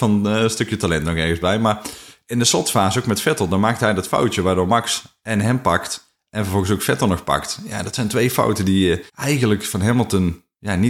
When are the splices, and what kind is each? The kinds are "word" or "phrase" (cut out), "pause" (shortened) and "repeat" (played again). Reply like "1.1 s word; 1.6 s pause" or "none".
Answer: 9.1 s pause